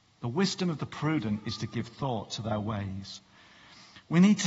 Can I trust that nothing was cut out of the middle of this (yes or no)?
yes